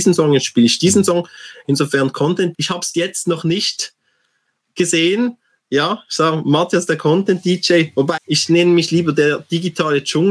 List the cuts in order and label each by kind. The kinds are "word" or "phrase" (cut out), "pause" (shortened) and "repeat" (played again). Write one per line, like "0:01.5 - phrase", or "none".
0:02.5 - word
0:02.9 - word
0:08.2 - word